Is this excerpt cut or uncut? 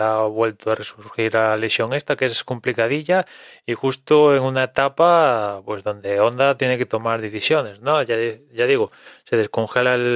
uncut